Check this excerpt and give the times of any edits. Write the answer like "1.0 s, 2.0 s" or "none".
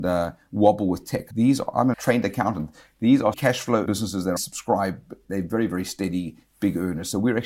1.3 s, 1.9 s, 3.3 s, 3.9 s, 4.4 s, 5.2 s